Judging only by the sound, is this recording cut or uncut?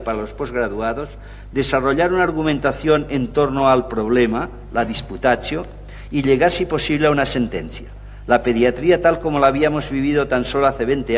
uncut